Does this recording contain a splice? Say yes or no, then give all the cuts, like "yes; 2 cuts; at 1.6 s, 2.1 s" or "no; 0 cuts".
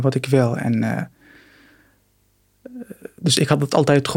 no; 0 cuts